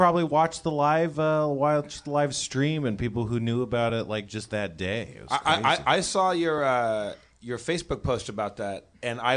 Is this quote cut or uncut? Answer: uncut